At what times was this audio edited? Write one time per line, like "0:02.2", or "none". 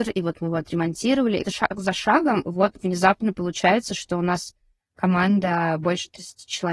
0:01.4